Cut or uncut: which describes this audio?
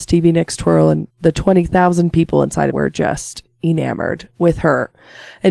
cut